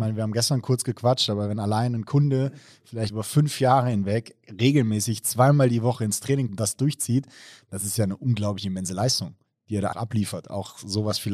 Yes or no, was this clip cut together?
yes